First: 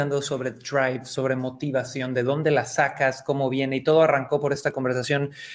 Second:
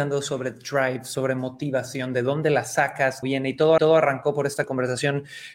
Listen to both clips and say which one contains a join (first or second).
second